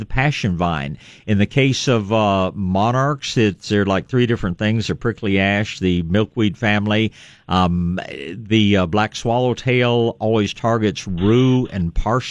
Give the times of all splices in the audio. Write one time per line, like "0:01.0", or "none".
none